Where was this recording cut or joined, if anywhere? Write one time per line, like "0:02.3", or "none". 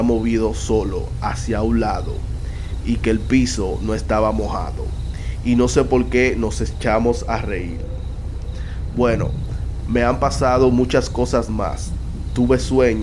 none